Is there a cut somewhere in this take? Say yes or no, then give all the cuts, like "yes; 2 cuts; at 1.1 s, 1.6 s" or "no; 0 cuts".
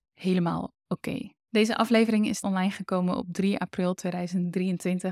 yes; 2 cuts; at 1.4 s, 2.4 s